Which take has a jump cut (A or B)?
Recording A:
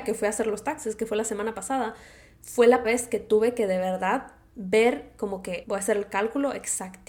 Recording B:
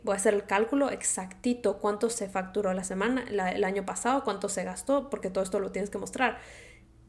A